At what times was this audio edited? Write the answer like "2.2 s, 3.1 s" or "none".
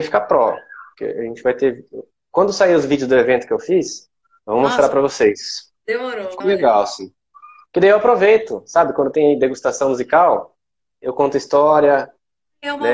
6.4 s